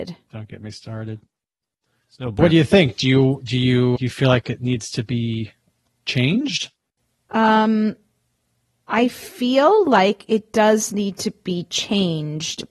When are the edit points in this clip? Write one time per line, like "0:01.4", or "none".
0:02.4
0:04.0

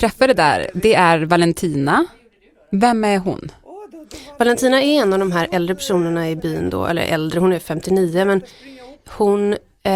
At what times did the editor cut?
none

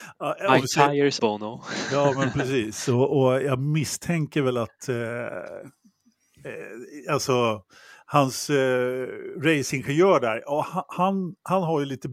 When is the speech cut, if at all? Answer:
0:01.2

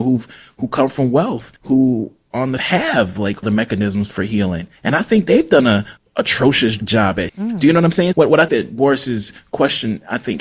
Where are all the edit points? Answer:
0:01.6
0:02.6
0:03.4
0:04.8
0:06.0
0:07.3
0:08.1
0:08.5

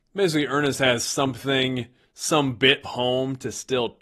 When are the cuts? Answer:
0:02.0
0:02.8

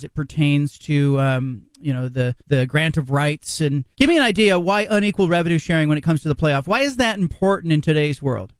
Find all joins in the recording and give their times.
0:02.4
0:03.9

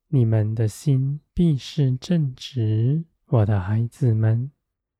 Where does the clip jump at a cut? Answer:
0:01.3
0:03.1

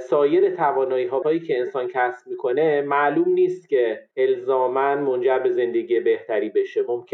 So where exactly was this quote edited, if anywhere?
0:01.2

